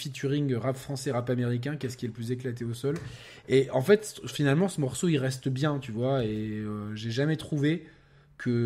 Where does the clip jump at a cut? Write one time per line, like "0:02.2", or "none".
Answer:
none